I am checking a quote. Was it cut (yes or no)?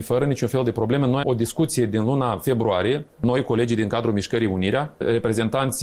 yes